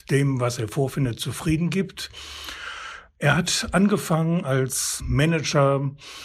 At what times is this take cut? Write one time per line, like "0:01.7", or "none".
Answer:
none